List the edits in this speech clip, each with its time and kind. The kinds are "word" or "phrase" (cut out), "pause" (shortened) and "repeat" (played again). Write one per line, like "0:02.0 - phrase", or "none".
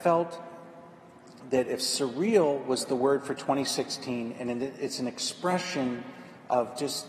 none